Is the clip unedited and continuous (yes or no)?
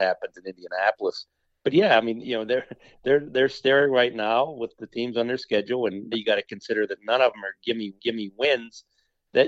no